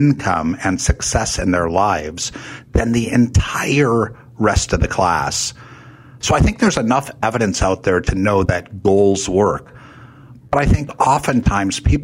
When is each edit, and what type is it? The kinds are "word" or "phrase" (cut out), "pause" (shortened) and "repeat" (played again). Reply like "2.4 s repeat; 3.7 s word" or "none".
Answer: none